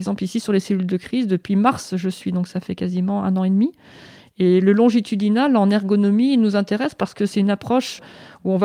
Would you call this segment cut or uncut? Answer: uncut